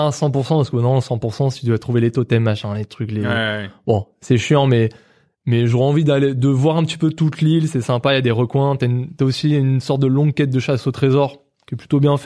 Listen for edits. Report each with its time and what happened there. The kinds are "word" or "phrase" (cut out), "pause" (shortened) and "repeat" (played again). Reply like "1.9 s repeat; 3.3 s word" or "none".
none